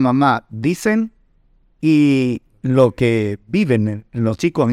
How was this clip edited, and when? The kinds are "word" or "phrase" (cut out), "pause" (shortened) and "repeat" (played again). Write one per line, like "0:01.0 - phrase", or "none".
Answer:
none